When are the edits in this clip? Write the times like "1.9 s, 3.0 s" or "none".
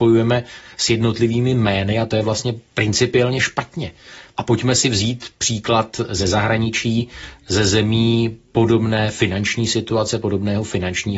none